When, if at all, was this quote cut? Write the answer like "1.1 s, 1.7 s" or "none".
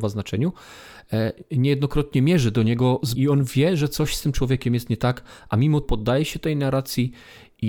3.1 s, 5.8 s